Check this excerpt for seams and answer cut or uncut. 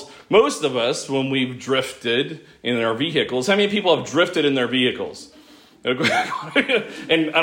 uncut